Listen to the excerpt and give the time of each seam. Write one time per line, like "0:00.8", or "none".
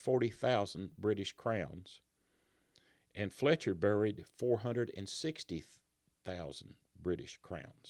none